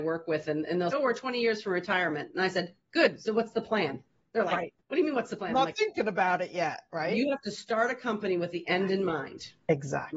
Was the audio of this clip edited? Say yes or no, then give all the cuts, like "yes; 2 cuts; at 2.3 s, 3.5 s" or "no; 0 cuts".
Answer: yes; 1 cut; at 0.9 s